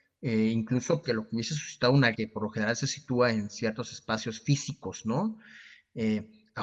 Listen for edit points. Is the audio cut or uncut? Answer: cut